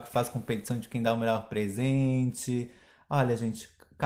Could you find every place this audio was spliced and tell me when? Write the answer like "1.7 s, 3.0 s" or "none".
none